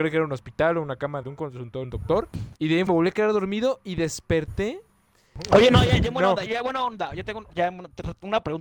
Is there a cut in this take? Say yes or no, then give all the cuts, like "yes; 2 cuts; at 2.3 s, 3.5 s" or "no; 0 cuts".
yes; 6 cuts; at 1.2 s, 1.8 s, 2.6 s, 2.9 s, 6.5 s, 7.5 s